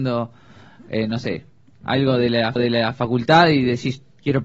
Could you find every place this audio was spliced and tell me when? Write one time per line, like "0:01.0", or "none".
0:02.6